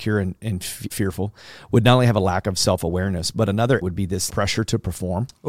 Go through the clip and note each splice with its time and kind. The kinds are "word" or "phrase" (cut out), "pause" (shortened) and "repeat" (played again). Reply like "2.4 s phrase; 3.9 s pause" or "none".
0.9 s word; 3.8 s word; 4.3 s word